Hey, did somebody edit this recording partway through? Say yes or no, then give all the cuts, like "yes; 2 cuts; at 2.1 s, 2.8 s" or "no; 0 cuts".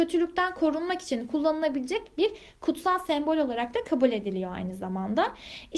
no; 0 cuts